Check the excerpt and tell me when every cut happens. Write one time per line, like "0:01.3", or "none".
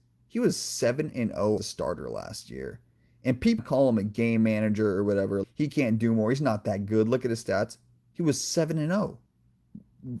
0:01.6
0:03.6
0:05.4